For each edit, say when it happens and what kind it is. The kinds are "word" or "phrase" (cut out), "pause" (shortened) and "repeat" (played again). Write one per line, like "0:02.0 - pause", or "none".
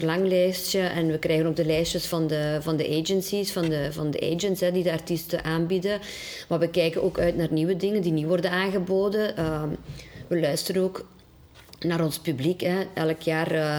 none